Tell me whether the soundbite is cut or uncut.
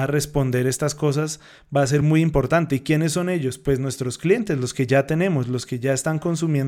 uncut